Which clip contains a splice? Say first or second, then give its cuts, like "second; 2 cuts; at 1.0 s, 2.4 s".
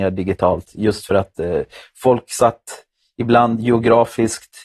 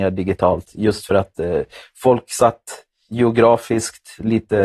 second; 1 cut; at 3.1 s